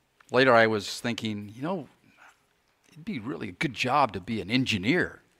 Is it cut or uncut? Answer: uncut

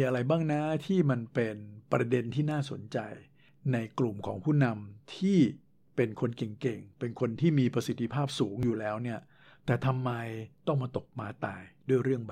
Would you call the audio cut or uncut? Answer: uncut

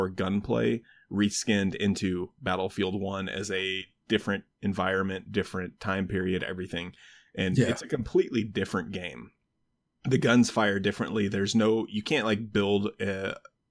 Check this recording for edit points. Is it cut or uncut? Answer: uncut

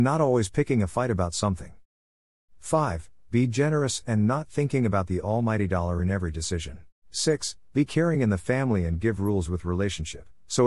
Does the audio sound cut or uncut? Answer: cut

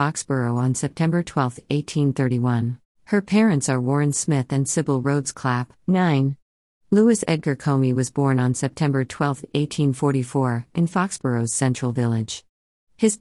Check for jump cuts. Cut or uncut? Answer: cut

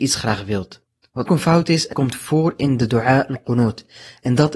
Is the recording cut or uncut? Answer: cut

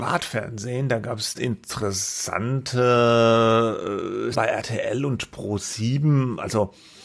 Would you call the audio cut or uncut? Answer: cut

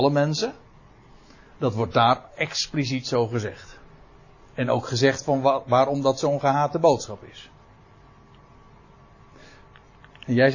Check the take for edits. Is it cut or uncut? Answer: uncut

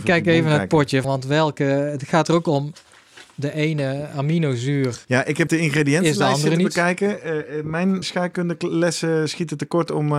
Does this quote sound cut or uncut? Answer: cut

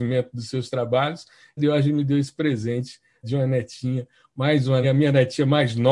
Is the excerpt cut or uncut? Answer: cut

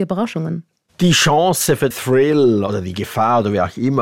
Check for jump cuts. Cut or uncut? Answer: cut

